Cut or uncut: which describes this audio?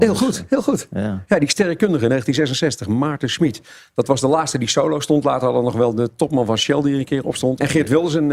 uncut